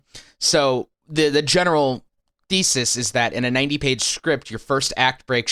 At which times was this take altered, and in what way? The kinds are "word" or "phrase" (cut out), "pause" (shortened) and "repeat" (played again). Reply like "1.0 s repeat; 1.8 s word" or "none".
none